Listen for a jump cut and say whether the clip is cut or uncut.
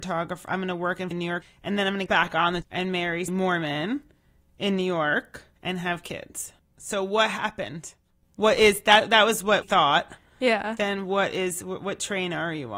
cut